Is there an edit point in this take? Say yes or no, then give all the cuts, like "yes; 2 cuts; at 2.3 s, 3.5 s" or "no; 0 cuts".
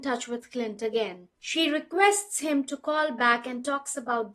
no; 0 cuts